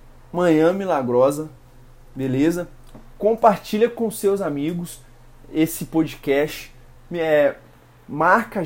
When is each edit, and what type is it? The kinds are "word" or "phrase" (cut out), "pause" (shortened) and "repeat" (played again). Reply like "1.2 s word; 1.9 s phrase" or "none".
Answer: none